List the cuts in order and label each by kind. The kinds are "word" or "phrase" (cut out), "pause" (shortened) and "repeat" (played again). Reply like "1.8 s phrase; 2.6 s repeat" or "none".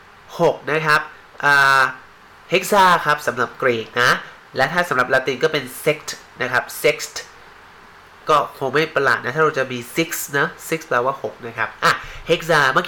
none